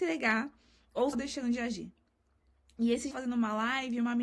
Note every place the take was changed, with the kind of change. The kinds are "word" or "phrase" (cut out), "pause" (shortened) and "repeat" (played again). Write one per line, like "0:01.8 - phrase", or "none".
0:01.1 - phrase
0:03.1 - phrase

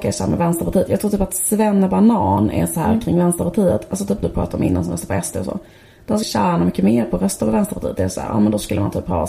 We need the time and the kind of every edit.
0:04.2 - word
0:06.2 - word

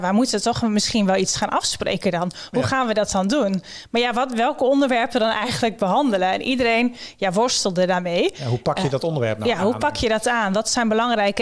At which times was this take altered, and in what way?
0:05.1 - word

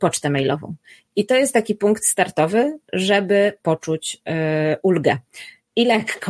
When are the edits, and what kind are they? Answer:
none

